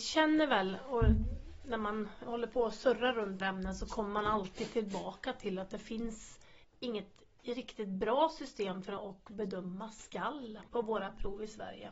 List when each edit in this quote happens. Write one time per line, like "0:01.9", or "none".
0:03.4
0:06.6
0:09.0
0:10.7